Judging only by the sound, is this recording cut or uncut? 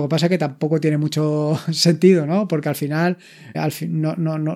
cut